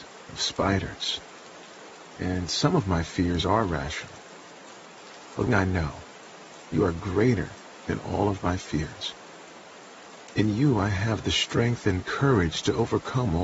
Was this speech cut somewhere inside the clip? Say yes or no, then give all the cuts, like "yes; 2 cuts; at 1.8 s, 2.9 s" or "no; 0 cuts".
yes; 1 cut; at 5.5 s